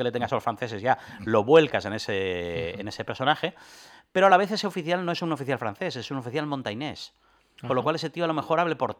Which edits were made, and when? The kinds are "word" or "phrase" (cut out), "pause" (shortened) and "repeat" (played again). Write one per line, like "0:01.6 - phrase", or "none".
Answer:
none